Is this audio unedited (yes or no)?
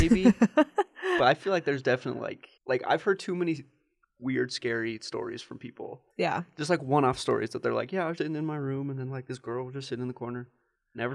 no